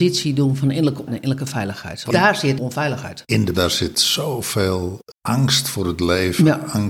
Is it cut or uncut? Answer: cut